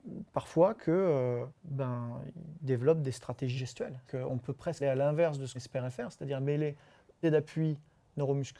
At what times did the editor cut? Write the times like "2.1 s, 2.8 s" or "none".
1.6 s, 3.6 s, 4.1 s, 4.8 s, 5.5 s, 7.2 s